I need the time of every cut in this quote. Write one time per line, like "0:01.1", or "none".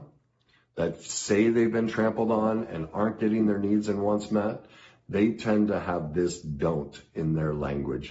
none